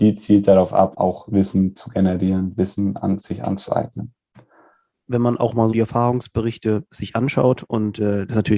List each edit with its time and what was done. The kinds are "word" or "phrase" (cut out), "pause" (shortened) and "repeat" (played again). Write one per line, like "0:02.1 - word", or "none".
0:00.9 - word
0:05.0 - word
0:05.7 - word